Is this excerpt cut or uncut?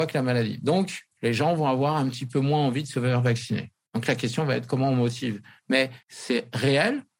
cut